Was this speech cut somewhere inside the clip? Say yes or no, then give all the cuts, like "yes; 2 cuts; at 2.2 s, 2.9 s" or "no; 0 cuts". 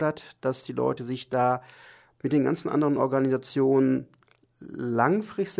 no; 0 cuts